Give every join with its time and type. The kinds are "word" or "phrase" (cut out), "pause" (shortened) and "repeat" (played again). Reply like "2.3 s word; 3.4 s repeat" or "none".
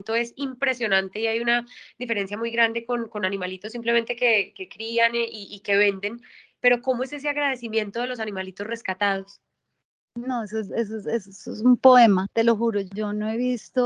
none